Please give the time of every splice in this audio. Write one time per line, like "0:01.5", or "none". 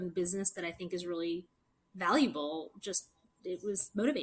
none